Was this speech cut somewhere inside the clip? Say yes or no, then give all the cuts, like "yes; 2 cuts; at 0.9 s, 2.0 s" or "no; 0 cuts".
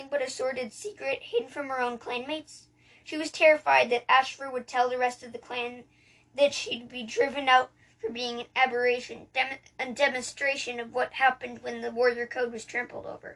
no; 0 cuts